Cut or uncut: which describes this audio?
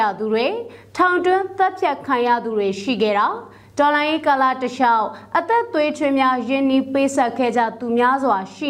uncut